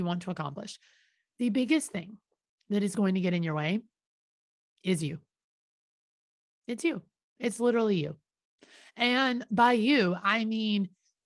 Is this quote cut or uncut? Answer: uncut